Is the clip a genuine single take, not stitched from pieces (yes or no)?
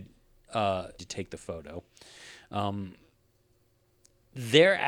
no